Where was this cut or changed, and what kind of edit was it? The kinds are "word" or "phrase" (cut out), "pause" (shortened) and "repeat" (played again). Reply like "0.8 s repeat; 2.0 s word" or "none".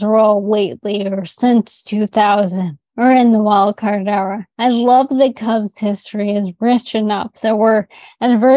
2.9 s pause; 4.5 s pause